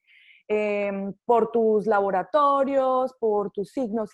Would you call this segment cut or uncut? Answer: uncut